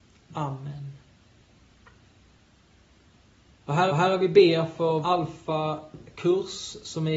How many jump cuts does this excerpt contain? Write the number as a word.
two